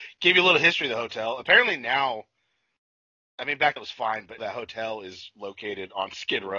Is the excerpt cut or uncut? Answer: cut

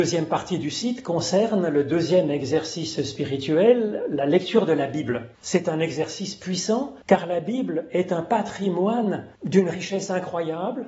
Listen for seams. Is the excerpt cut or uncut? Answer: cut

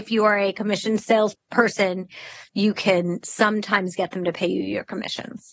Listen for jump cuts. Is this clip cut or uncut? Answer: cut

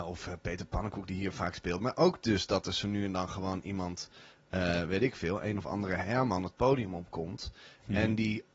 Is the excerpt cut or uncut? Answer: uncut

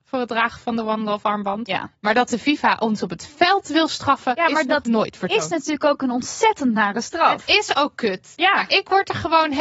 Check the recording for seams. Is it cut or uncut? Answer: uncut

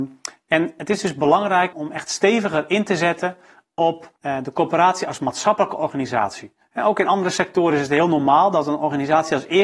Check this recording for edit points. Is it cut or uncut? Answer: cut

